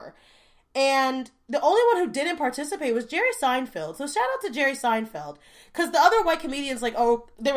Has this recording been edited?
no; 0 cuts

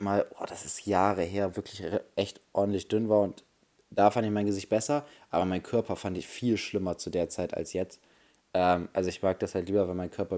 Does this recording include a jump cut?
yes; 1 cut; at 1.5 s

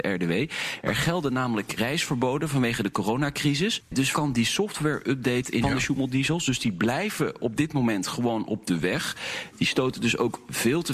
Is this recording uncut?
no; 3 cuts; at 1.8 s, 4.1 s, 5.6 s

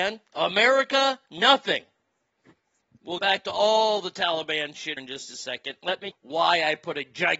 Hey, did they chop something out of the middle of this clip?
yes; 3 cuts; at 3.2 s, 5.0 s, 6.1 s

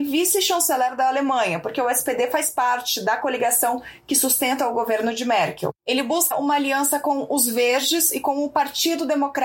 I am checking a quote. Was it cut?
yes; 2 cuts; at 5.8 s, 6.3 s

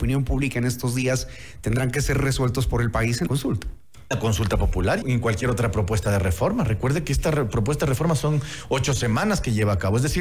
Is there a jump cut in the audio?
yes; 3 cuts; at 3.3 s, 4.1 s, 5.0 s

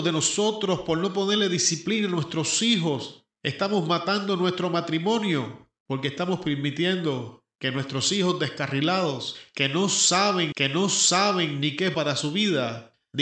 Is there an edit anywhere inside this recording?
yes; 2 cuts; at 10.5 s, 11.9 s

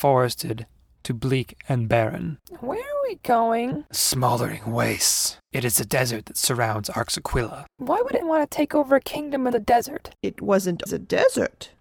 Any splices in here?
yes; 3 cuts; at 8.2 s, 9.5 s, 10.9 s

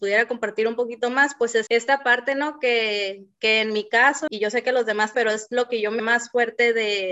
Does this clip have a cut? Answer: yes; 4 cuts; at 1.7 s, 4.3 s, 5.1 s, 6.0 s

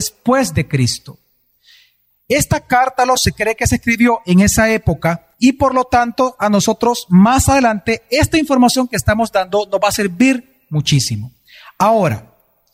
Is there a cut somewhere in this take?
yes; 2 cuts; at 3.2 s, 5.3 s

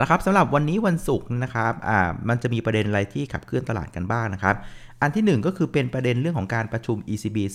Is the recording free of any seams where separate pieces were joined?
yes; 0 cuts

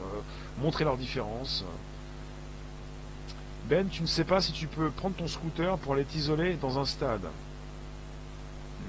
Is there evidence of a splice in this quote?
no; 0 cuts

